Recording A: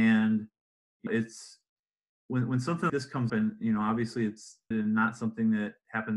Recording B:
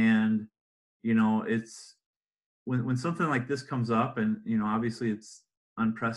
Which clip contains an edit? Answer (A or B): A